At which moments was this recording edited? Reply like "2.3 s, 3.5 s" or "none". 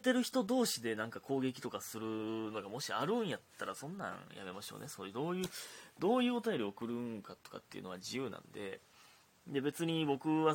none